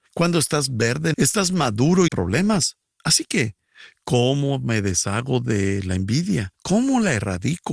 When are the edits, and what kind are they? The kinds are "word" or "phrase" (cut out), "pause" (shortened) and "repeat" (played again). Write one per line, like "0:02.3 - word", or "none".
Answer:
0:01.1 - word
0:02.1 - phrase
0:02.9 - pause
0:06.6 - pause